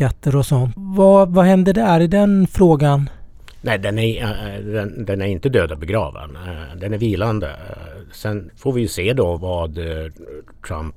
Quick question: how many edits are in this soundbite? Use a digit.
1